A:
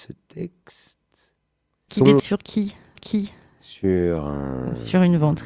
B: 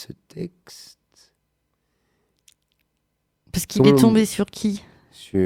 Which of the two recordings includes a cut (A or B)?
A